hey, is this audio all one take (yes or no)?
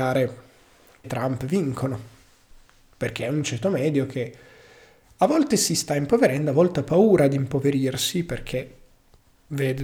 no